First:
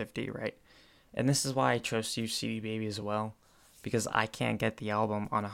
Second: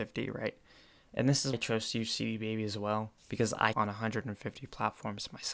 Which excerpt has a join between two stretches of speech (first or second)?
second